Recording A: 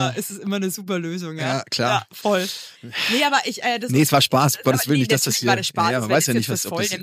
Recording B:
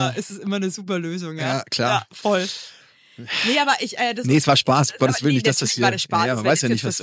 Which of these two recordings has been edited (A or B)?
A